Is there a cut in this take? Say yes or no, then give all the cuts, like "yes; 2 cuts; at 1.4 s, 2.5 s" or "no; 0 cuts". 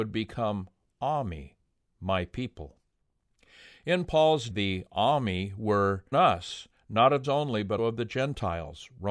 yes; 4 cuts; at 4.5 s, 6.1 s, 7.2 s, 7.8 s